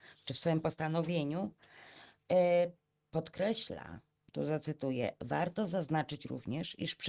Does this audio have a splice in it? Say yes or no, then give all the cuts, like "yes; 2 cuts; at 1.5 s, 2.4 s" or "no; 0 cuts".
no; 0 cuts